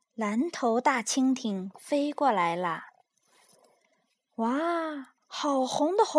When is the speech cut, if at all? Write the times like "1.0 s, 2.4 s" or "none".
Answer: 5.2 s

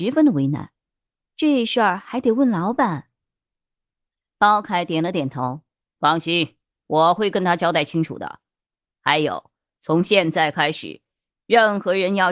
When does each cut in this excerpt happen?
none

